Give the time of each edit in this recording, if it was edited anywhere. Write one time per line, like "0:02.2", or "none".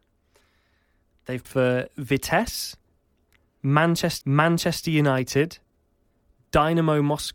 0:01.4
0:04.2